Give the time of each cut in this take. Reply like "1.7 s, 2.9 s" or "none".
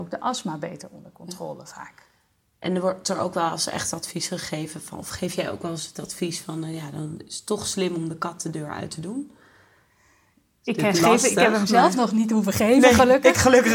none

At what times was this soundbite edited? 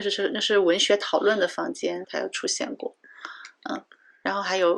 2.0 s

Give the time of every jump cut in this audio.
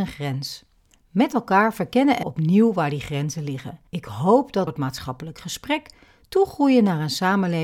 2.2 s, 3.9 s, 4.7 s

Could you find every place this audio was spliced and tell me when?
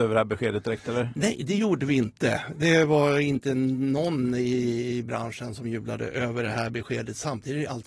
none

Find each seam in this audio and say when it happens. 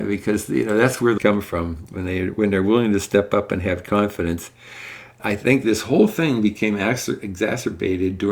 1.2 s, 5.2 s

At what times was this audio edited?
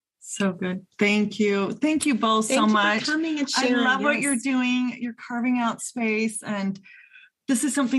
none

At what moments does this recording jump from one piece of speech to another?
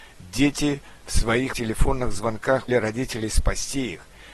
1.5 s, 2.7 s

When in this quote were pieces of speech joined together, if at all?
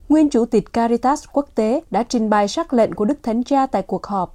1.8 s

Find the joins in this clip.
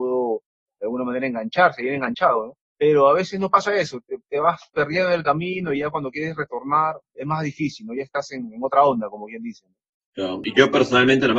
2.7 s, 7.0 s

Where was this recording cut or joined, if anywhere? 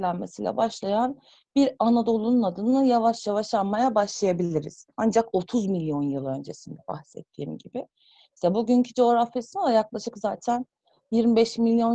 4.9 s

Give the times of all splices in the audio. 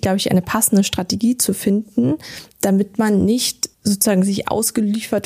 2.5 s, 3.7 s

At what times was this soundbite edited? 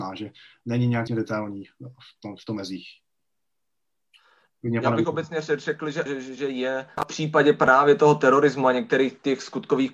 1.1 s, 2.5 s, 6.1 s, 6.4 s, 7.0 s

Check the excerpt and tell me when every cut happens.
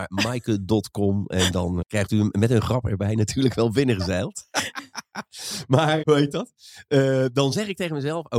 1.8 s, 6.0 s

